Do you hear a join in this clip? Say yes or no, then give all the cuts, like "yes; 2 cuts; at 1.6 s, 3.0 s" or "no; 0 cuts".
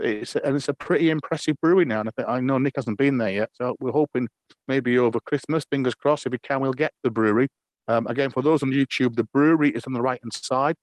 no; 0 cuts